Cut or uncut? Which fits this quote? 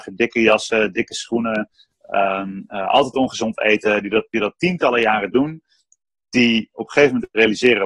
uncut